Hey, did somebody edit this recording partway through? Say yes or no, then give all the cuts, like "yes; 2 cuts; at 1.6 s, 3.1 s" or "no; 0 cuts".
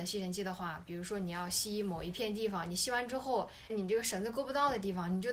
yes; 1 cut; at 3.7 s